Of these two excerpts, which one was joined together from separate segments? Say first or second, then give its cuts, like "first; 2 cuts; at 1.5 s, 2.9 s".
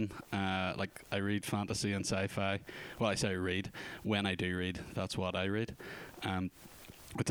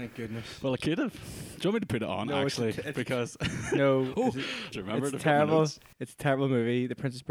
second; 1 cut; at 4.7 s